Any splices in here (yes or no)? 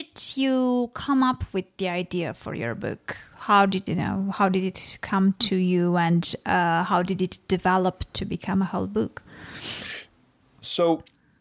yes